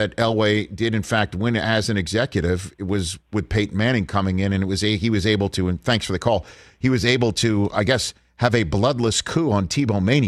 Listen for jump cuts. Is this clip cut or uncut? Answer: uncut